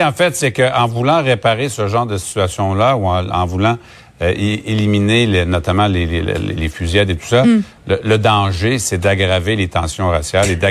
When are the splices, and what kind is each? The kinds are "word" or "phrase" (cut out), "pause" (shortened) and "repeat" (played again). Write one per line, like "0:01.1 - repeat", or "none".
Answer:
none